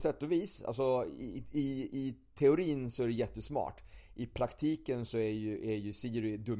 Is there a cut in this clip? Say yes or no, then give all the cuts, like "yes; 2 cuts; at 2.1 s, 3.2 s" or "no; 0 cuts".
no; 0 cuts